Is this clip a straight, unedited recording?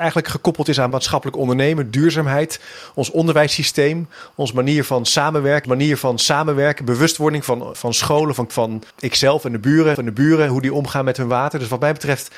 no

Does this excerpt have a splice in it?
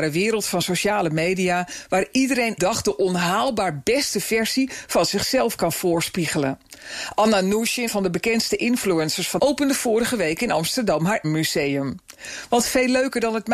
yes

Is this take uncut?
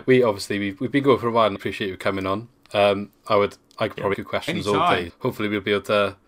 no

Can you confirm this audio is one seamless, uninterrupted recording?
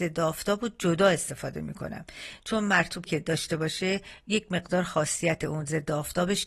no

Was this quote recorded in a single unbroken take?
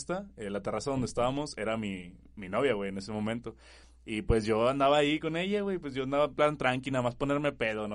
yes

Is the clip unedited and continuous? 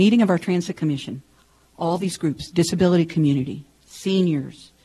yes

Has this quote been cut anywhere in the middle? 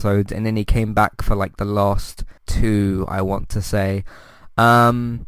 yes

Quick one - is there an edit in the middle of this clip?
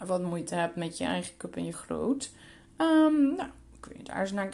yes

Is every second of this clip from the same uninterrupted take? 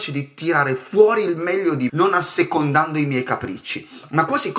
no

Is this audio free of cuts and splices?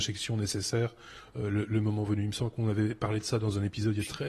yes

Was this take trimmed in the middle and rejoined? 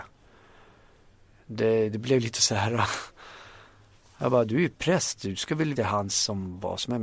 yes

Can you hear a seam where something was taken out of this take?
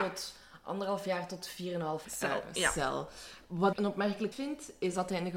yes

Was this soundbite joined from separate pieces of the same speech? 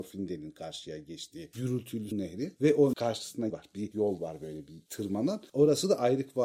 yes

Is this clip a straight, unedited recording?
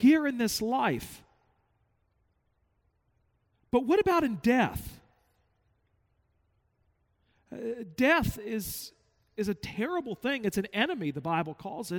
yes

